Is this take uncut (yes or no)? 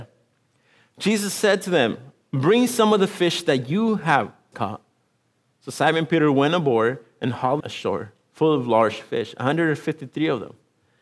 no